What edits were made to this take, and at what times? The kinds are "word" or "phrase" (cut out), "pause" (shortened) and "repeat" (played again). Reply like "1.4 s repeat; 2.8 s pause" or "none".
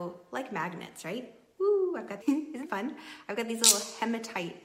2.2 s word; 2.7 s word

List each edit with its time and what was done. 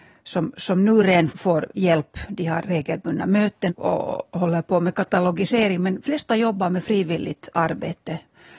1.3 s word; 3.7 s word; 6.0 s word

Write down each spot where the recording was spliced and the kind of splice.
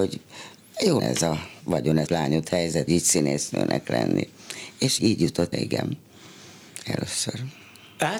1.0 s word; 2.1 s word; 2.9 s word; 5.0 s word; 5.5 s word

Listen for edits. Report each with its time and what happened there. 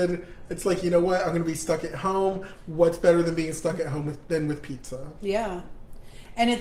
none

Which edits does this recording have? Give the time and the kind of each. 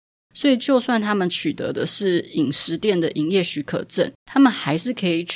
4.2 s pause

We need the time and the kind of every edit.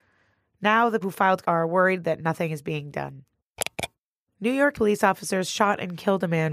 1.0 s word; 1.4 s word; 4.7 s word

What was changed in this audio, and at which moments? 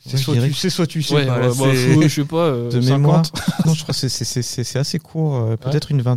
3.6 s word

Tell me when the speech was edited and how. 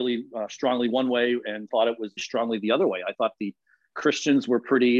1.7 s word; 2.2 s word

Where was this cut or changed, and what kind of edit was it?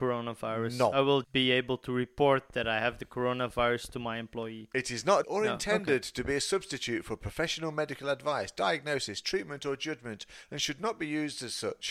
1.2 s word; 5.2 s word

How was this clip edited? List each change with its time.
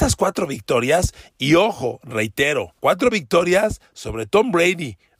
2.8 s pause

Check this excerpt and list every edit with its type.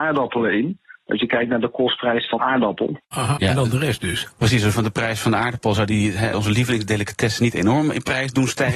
2.4 s word; 3.4 s word; 4.7 s word; 6.3 s word

